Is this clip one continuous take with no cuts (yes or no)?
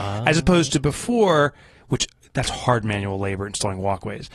yes